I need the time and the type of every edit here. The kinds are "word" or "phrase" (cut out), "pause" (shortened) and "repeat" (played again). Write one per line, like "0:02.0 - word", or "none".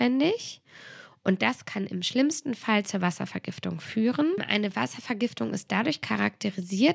none